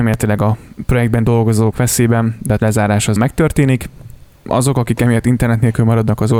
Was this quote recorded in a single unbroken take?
no; 4 cuts; at 1.7 s, 2.6 s, 3.2 s, 4.5 s

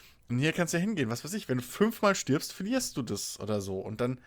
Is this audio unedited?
yes; 0 cuts

